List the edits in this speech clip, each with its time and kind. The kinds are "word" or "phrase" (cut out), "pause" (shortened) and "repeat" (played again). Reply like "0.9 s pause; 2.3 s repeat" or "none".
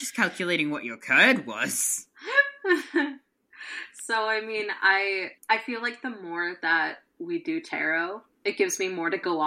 5.4 s pause